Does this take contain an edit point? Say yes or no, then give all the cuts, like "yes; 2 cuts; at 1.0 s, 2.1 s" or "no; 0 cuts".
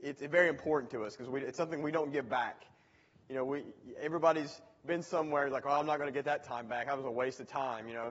no; 0 cuts